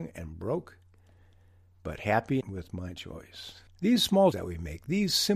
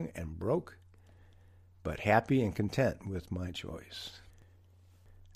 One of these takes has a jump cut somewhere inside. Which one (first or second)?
first